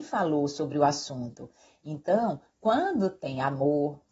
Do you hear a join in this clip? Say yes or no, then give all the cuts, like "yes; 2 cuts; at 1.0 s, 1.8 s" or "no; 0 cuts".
no; 0 cuts